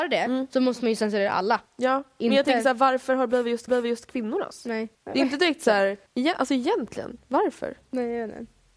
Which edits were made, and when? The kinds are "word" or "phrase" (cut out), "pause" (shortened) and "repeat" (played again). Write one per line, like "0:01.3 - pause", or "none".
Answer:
0:01.7 - pause
0:03.7 - repeat
0:04.9 - pause
0:06.1 - pause

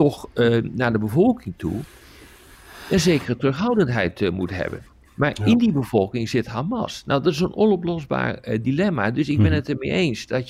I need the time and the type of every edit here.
none

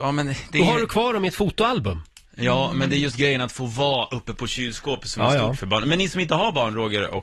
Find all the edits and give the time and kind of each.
none

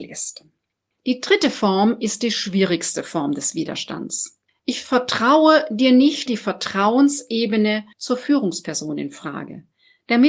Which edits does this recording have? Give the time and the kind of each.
0:04.5 - pause
0:06.3 - word
0:07.9 - pause

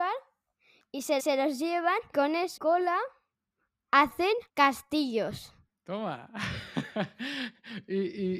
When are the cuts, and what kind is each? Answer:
0:01.2 - repeat
0:02.1 - word
0:02.6 - word
0:04.5 - pause

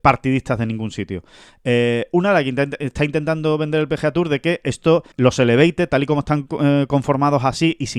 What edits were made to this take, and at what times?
0:05.1 - pause

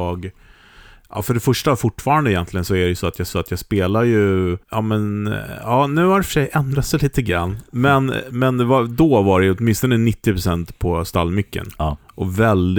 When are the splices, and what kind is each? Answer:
0:03.3 - repeat
0:04.6 - pause

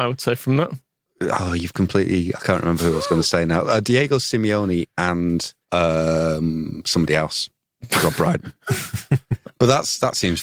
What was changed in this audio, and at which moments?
0:05.6 - pause

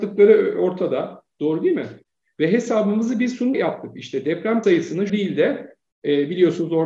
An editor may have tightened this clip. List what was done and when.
0:03.5 - word
0:04.6 - word
0:05.1 - word

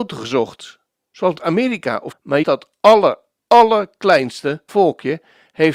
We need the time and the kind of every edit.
0:01.3 - word
0:02.1 - word
0:02.4 - word
0:04.7 - word

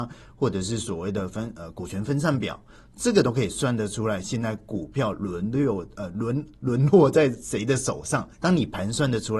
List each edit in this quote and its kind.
0:08.3 - pause

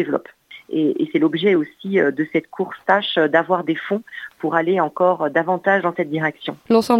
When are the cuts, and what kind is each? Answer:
none

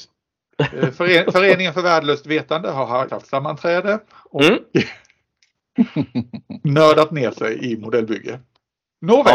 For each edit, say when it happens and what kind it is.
0:03.1 - word

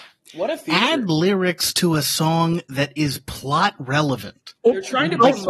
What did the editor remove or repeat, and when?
none

